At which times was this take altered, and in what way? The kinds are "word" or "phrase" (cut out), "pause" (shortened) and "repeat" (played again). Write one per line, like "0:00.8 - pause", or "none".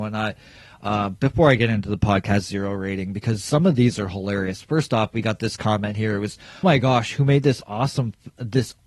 0:06.6 - word